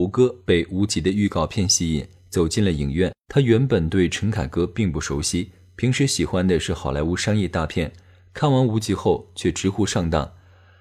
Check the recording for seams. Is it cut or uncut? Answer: cut